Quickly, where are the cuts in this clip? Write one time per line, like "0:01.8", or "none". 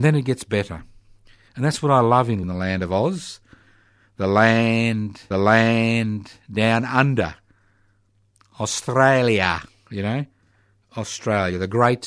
0:02.4
0:05.3